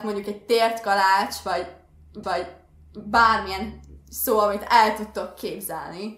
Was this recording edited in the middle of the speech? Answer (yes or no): yes